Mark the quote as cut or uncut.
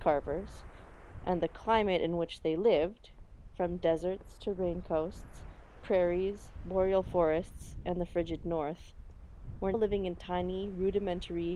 cut